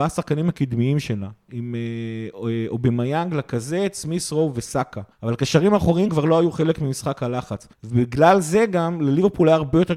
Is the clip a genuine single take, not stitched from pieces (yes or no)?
no